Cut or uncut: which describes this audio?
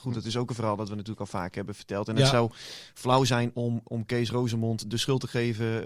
uncut